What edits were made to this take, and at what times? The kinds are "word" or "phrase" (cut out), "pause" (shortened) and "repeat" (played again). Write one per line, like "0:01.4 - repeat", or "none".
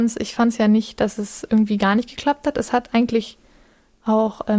none